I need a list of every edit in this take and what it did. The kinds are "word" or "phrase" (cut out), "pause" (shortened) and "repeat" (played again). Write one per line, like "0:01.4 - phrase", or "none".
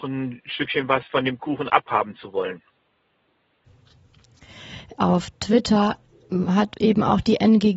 none